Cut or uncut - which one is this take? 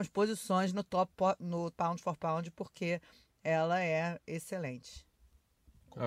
cut